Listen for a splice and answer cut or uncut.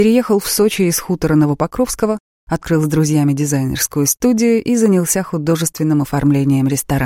uncut